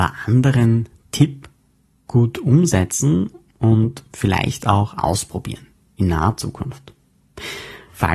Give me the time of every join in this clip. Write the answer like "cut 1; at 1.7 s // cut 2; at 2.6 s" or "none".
none

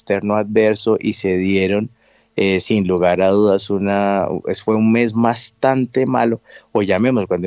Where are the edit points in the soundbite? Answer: none

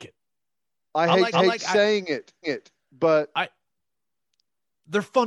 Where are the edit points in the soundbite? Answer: cut 1; at 1.3 s // cut 2; at 2.4 s

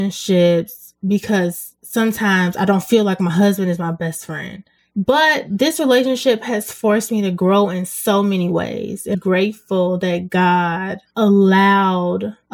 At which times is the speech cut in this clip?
cut 1; at 4.8 s // cut 2; at 9.1 s

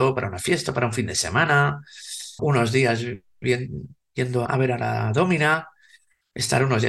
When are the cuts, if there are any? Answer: cut 1; at 2.4 s // cut 2; at 4.5 s

